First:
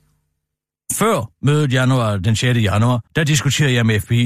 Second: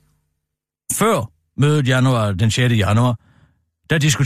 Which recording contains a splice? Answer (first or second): first